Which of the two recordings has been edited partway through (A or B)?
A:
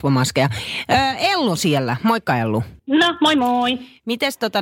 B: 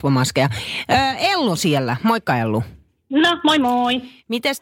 A